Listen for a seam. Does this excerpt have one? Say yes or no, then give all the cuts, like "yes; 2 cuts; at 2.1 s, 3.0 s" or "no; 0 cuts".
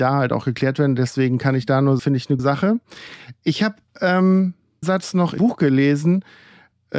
yes; 4 cuts; at 2.0 s, 2.4 s, 4.8 s, 5.4 s